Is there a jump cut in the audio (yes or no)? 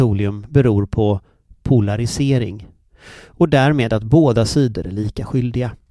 no